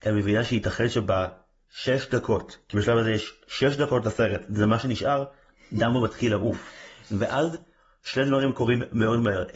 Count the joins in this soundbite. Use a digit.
0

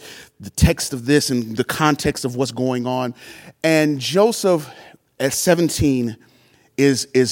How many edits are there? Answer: 0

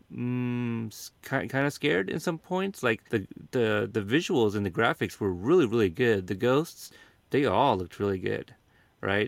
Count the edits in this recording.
2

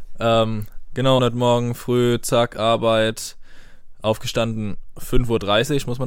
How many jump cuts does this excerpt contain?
1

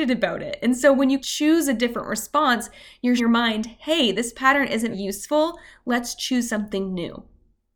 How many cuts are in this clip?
3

